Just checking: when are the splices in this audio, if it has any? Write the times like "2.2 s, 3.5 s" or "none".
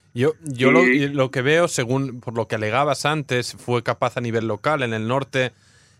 none